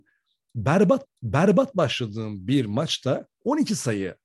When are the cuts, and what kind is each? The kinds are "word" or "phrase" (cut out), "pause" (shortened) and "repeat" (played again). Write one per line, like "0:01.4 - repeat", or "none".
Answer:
0:01.1 - repeat
0:03.3 - pause